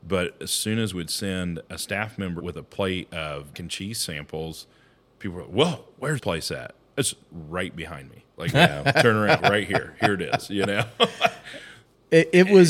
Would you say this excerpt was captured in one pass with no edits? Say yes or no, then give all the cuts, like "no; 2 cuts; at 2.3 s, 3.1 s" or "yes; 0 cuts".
no; 7 cuts; at 0.9 s, 2.4 s, 3.5 s, 6.2 s, 8.5 s, 8.9 s, 9.4 s